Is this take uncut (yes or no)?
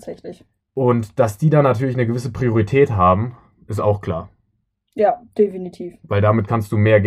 yes